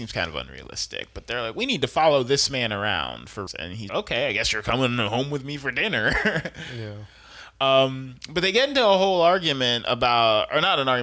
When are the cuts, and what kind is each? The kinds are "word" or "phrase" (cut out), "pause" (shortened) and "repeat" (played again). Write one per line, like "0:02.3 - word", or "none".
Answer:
0:03.5 - word
0:03.9 - word